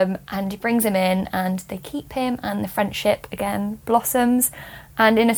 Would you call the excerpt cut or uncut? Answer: uncut